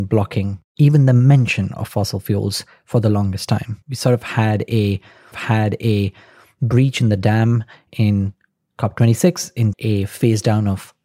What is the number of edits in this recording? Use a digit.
3